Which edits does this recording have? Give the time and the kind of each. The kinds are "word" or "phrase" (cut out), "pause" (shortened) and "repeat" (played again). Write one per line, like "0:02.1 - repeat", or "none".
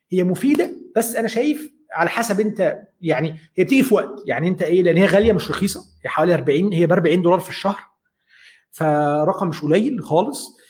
none